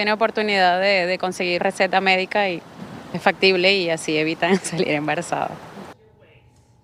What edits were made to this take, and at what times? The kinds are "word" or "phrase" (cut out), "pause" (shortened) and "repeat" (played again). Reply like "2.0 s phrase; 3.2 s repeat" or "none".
1.6 s word; 3.1 s word